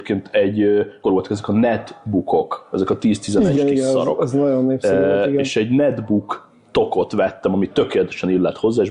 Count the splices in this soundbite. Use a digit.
2